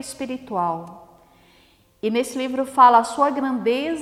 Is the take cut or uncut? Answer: uncut